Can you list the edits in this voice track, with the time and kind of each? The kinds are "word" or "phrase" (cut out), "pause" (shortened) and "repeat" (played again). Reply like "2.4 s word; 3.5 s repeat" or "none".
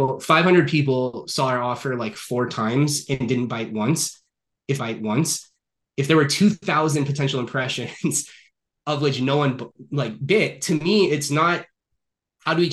4.8 s repeat